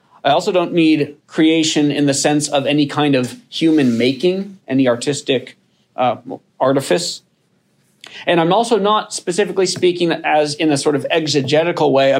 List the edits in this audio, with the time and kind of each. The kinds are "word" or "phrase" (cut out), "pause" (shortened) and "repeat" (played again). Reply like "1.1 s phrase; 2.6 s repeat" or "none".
1.2 s pause